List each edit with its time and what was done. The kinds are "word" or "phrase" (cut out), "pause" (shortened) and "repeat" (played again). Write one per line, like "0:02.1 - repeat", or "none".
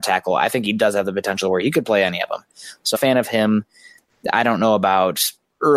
0:02.9 - phrase